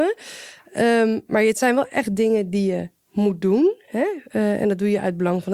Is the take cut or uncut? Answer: uncut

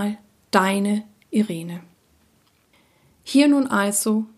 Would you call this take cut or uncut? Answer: uncut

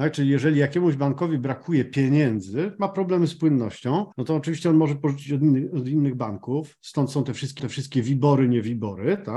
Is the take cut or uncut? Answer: cut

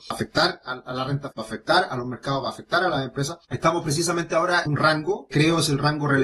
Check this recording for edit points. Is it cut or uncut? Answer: cut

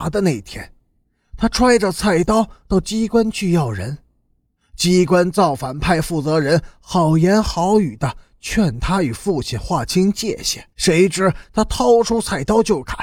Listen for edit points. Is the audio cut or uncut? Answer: cut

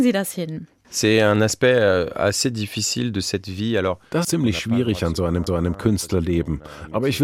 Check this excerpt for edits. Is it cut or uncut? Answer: cut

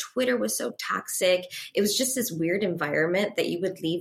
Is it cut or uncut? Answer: uncut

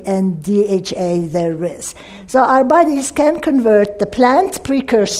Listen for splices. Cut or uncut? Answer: uncut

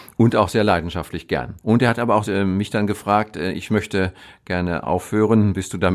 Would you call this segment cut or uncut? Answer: cut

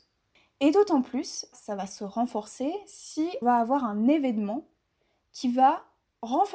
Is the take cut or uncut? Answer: cut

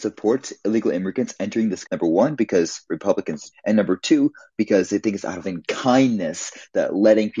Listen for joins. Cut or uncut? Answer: cut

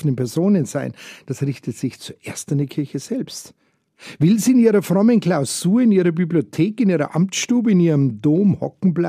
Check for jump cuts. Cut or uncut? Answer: uncut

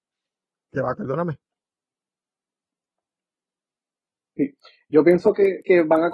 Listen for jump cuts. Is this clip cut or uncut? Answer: cut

